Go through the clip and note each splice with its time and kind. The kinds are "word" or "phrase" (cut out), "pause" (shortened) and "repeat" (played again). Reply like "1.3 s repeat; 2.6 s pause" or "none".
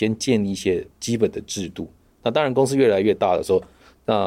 0.9 s pause